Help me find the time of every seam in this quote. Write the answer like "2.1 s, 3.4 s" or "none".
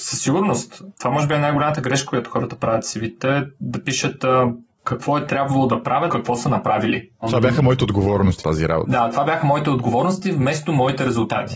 6.1 s, 8.4 s